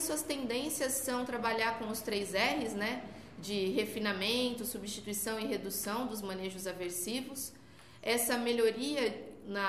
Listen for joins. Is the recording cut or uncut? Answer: uncut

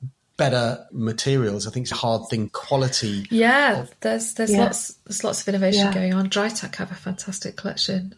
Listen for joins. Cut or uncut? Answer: cut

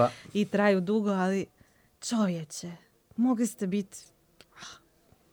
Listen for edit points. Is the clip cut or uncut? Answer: uncut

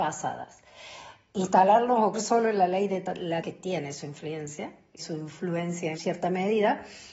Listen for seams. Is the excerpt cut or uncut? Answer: cut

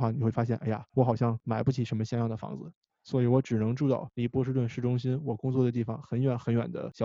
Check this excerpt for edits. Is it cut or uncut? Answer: uncut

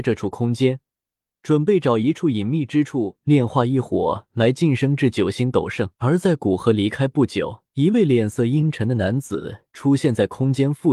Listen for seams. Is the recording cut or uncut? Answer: cut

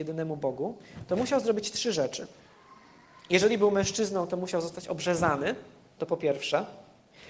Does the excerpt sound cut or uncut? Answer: uncut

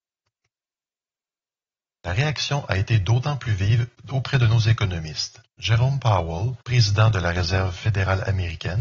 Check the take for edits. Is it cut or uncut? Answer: cut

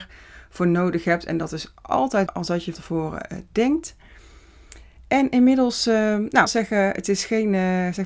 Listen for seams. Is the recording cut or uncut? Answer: cut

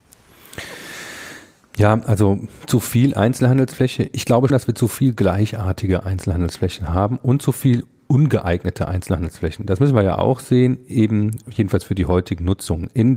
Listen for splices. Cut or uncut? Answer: cut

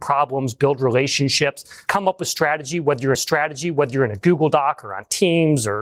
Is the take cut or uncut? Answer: cut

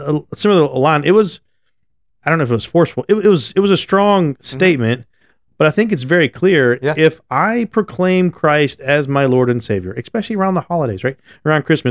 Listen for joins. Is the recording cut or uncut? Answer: uncut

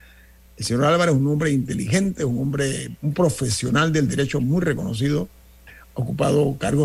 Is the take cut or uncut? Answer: uncut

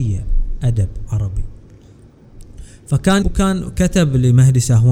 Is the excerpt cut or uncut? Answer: cut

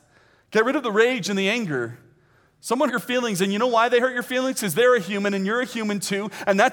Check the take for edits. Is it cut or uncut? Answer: cut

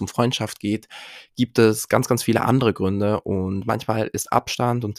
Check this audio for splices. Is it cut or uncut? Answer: uncut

